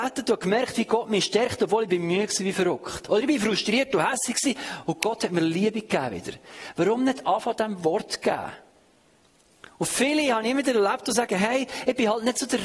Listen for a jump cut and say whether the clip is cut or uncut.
uncut